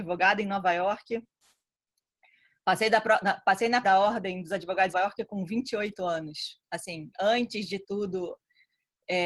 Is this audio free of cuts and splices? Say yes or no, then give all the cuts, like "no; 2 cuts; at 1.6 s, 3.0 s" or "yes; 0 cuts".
no; 4 cuts; at 3.8 s, 4.9 s, 7.1 s, 7.8 s